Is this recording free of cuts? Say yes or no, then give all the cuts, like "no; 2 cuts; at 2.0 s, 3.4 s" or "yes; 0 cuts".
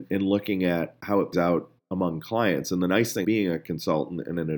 no; 2 cuts; at 1.3 s, 3.2 s